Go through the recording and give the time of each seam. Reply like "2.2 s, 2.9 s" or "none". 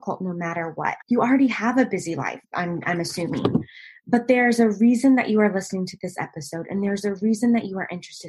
1.0 s, 2.4 s

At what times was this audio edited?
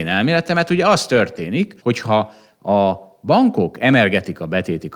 1.8 s

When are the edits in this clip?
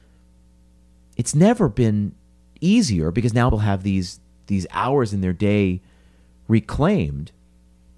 3.5 s

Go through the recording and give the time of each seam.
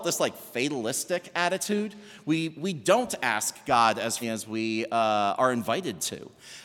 4.2 s

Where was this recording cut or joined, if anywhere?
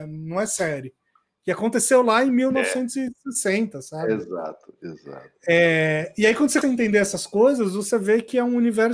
5.3 s, 6.6 s

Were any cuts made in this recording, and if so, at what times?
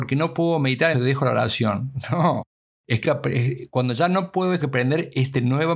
0.9 s, 3.0 s, 4.6 s

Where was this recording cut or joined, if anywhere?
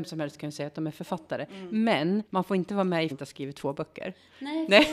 2.3 s, 3.1 s

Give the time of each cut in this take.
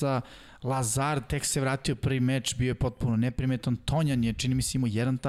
none

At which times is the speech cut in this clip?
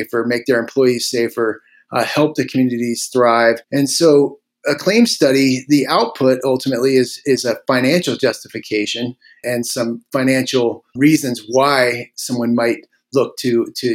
3.6 s, 9.4 s, 11.0 s

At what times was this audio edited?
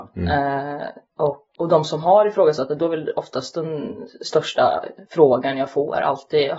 1.5 s, 5.0 s

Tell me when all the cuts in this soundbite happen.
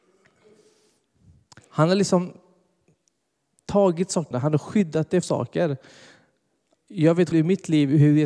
4.3 s, 5.2 s, 7.3 s

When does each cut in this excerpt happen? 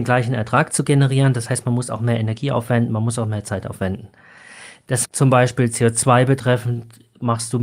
5.0 s

